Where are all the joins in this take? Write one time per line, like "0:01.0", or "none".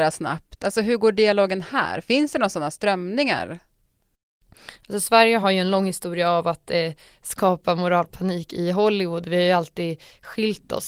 none